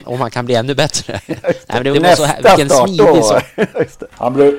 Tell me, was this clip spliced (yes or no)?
yes